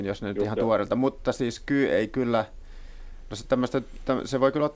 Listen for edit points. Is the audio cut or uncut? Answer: uncut